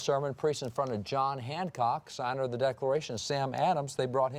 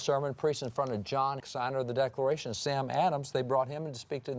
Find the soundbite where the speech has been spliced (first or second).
second